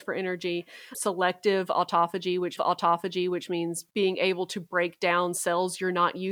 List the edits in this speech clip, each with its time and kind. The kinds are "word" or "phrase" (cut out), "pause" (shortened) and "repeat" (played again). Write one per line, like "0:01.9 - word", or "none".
0:02.6 - repeat